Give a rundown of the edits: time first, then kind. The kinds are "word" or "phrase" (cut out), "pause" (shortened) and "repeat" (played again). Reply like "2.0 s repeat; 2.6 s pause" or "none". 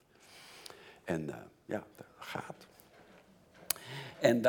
1.9 s pause